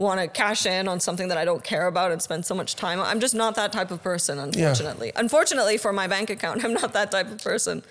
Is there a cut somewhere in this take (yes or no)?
no